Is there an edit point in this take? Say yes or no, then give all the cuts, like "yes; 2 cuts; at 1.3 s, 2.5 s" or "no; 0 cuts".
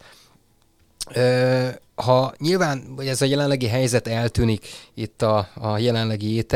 no; 0 cuts